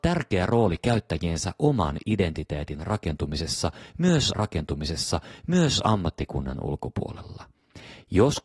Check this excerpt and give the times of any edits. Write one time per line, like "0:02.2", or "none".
0:04.3